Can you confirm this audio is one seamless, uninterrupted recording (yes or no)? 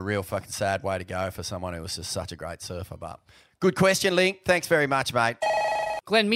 yes